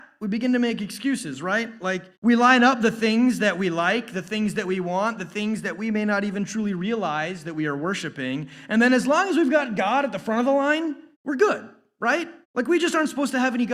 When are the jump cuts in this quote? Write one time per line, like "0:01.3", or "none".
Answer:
0:02.1
0:11.1
0:12.4